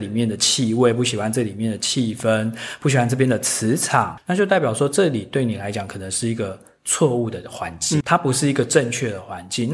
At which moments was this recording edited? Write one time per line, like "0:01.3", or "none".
0:08.0